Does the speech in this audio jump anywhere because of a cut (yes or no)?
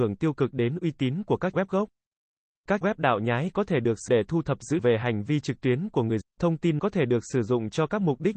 yes